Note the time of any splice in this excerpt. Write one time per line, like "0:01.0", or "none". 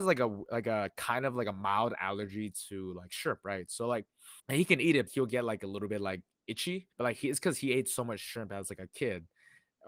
0:04.4
0:05.1
0:06.9